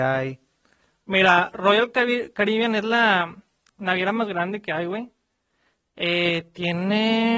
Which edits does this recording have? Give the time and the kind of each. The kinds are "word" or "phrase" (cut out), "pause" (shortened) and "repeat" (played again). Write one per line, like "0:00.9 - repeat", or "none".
none